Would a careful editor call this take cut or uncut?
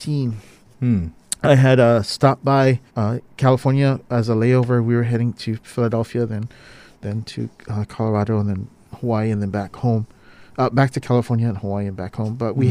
cut